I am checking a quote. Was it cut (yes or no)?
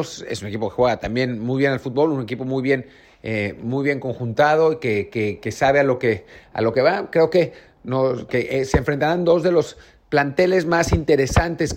no